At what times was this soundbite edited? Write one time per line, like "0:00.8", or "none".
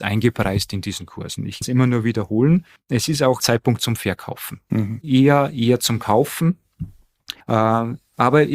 0:01.6
0:02.8
0:03.4
0:07.4